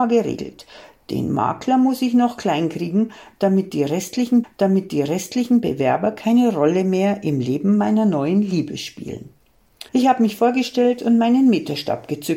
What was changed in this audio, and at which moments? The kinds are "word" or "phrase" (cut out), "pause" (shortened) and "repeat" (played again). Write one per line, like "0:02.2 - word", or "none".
0:04.4 - repeat
0:09.9 - pause

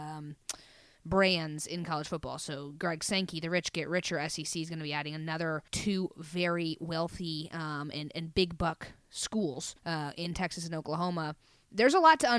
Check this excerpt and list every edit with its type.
0:05.7 - pause
0:09.8 - pause

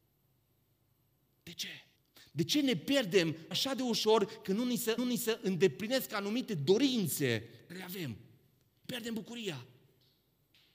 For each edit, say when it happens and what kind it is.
0:02.0 - pause
0:03.5 - word
0:05.0 - repeat
0:07.7 - word
0:08.8 - word

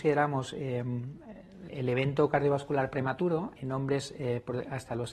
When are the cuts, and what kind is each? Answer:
0:01.7 - word
0:03.6 - word

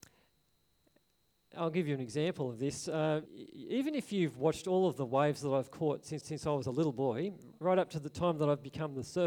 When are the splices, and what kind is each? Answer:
0:03.2 - word
0:06.2 - repeat
0:07.5 - word

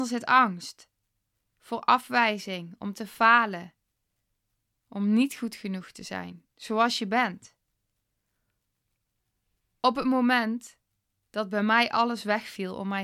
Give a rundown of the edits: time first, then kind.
0:06.5 - pause

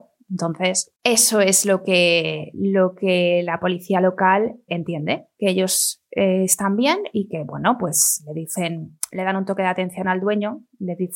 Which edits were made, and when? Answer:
0:01.0 - pause
0:04.7 - word

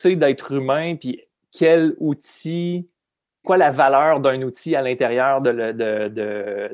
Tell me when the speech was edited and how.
0:03.4 - word

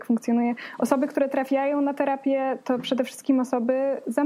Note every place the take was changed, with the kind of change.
none

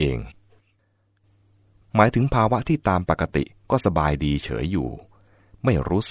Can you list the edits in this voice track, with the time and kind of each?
none

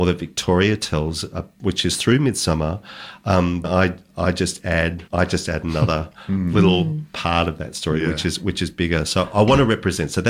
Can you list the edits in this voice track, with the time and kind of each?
0:03.6 - word
0:05.1 - pause

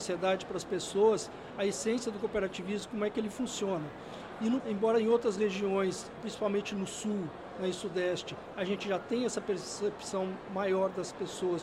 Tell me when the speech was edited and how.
0:04.6 - word
0:06.2 - word

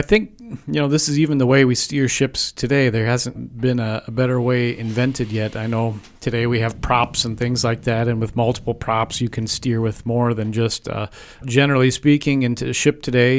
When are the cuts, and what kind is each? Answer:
0:03.4 - word
0:11.4 - phrase

